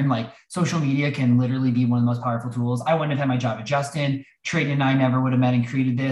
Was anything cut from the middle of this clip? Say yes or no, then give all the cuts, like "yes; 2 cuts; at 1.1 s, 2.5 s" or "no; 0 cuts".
no; 0 cuts